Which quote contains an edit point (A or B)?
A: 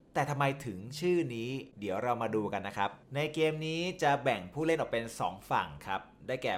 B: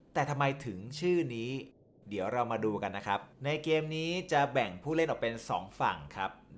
A